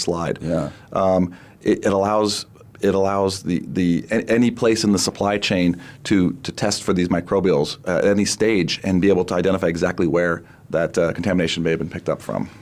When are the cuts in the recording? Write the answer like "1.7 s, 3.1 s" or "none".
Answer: none